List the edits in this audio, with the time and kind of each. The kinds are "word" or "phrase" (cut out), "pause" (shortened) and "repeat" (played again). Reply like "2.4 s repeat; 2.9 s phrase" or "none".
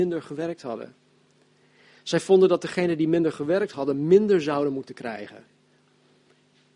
none